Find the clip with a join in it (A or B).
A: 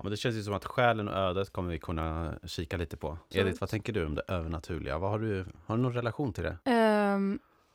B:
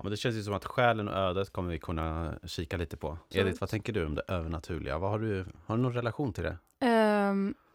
A